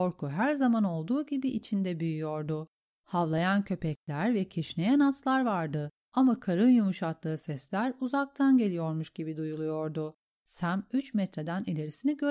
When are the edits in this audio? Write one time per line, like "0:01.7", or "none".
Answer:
none